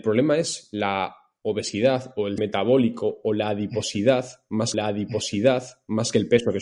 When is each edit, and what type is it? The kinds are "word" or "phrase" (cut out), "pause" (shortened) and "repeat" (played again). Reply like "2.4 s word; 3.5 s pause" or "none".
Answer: 2.4 s word; 4.7 s repeat